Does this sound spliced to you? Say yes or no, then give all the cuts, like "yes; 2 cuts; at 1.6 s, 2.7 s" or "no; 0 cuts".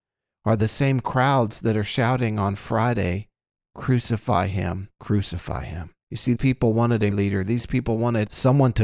yes; 4 cuts; at 4.9 s, 6.0 s, 6.4 s, 7.1 s